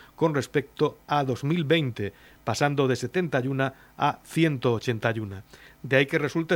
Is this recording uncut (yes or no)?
yes